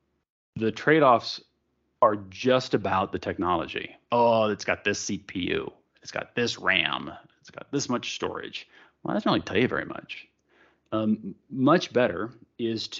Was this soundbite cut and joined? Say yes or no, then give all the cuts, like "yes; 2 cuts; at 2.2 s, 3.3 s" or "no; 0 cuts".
no; 0 cuts